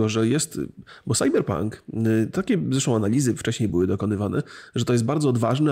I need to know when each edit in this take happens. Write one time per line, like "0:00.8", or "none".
none